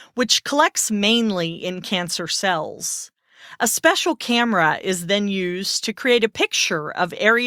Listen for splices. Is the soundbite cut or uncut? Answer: uncut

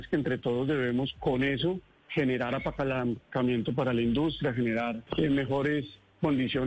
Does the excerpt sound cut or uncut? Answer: cut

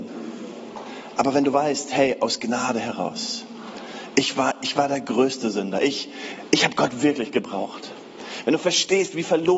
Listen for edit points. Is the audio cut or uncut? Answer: uncut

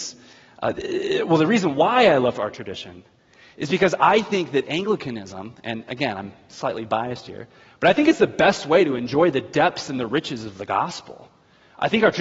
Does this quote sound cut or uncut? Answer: uncut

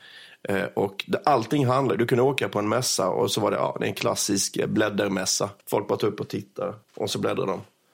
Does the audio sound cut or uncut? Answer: cut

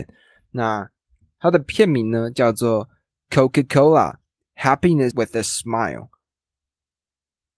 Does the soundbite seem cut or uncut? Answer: cut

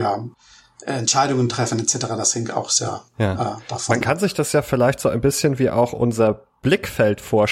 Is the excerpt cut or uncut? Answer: cut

